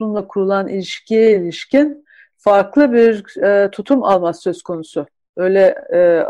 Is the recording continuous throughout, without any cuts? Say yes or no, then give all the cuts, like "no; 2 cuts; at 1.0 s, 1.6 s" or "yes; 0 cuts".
yes; 0 cuts